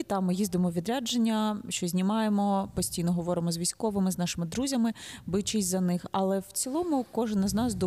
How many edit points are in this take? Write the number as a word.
zero